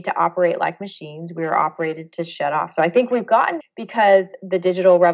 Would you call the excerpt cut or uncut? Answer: cut